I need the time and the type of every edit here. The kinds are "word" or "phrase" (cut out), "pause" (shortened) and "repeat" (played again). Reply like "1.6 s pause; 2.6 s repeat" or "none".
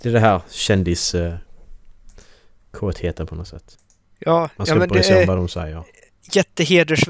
none